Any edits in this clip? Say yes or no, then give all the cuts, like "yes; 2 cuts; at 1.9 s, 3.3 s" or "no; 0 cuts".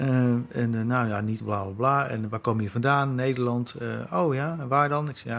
yes; 1 cut; at 1.4 s